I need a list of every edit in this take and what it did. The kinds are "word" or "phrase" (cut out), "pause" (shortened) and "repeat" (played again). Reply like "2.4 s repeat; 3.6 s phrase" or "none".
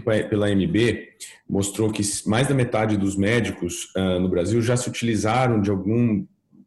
none